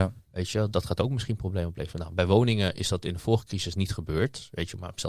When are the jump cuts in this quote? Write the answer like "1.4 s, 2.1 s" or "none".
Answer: none